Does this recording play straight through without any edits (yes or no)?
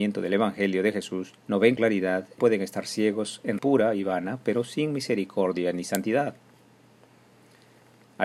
no